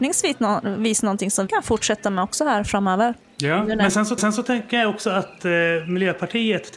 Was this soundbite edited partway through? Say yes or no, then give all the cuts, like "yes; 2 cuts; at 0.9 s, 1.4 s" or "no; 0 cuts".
yes; 3 cuts; at 1.5 s, 3.2 s, 4.2 s